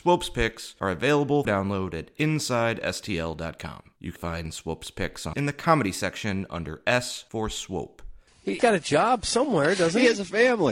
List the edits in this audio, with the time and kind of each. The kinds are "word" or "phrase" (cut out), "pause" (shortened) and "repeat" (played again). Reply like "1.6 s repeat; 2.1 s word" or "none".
1.4 s word; 4.2 s word; 5.3 s word; 8.6 s word